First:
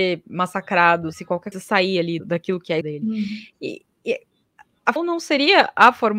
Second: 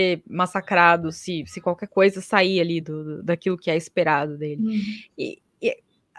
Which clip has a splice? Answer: first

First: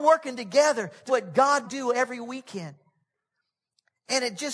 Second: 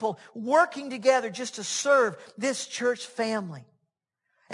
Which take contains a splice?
first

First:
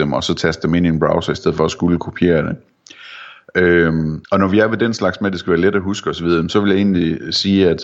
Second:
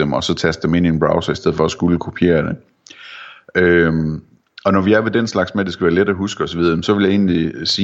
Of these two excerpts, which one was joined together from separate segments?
first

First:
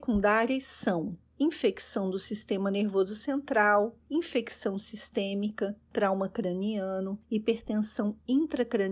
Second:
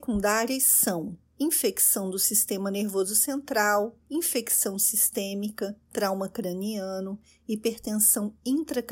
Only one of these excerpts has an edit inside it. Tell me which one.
first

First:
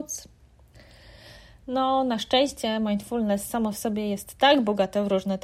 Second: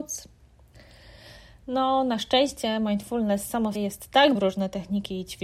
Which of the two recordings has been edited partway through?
second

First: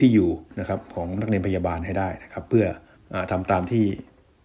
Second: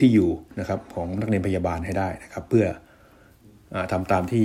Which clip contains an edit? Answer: first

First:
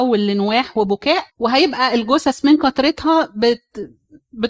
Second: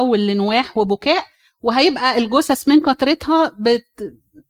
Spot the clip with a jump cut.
first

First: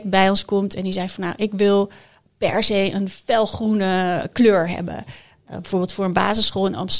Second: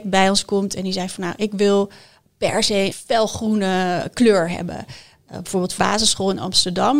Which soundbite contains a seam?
second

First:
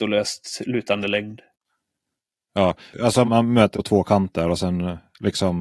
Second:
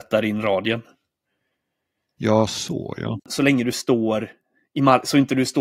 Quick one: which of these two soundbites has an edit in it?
first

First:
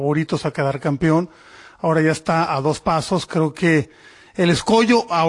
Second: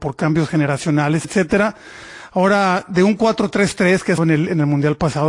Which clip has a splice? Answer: second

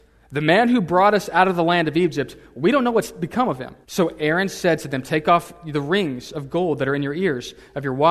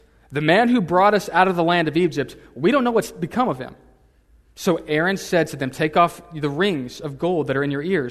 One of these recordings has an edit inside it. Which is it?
first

